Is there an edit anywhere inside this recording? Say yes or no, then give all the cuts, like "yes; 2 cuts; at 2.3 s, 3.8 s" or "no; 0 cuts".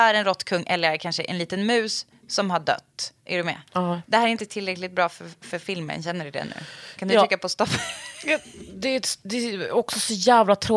yes; 2 cuts; at 3.2 s, 3.7 s